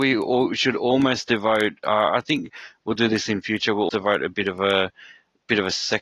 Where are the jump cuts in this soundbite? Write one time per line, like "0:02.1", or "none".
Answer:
0:03.9